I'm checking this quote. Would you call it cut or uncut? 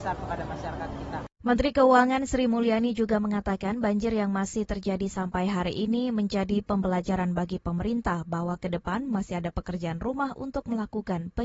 uncut